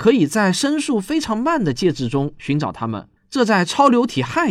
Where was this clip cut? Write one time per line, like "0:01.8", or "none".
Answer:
0:03.2